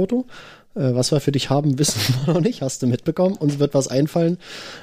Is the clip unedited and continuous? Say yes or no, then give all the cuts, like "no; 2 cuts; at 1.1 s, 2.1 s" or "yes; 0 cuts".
yes; 0 cuts